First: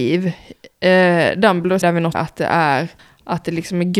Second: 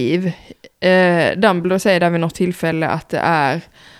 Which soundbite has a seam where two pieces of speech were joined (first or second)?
first